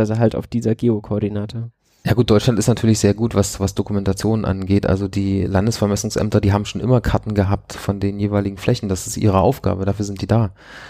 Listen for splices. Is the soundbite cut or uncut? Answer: cut